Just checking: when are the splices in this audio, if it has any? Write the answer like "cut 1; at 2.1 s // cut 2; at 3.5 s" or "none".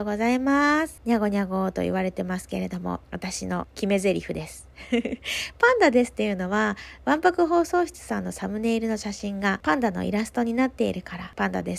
cut 1; at 3.0 s